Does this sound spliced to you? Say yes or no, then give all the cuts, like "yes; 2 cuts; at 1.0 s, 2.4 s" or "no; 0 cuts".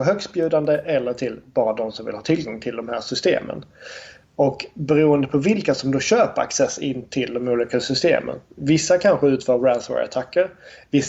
no; 0 cuts